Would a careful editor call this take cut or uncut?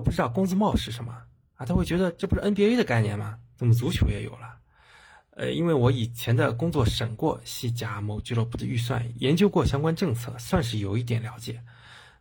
uncut